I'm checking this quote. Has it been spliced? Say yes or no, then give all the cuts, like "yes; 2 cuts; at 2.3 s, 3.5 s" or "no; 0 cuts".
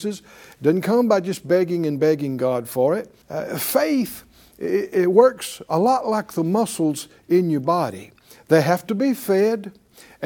yes; 1 cut; at 3.2 s